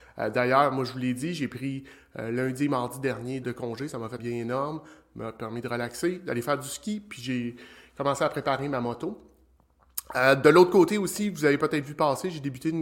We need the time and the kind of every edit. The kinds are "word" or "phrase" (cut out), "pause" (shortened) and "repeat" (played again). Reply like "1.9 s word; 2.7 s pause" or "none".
3.4 s word; 4.2 s word